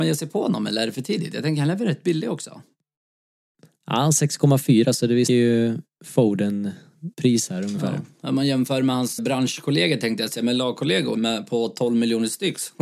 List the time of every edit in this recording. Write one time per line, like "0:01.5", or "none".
0:05.3
0:07.1
0:09.2
0:11.1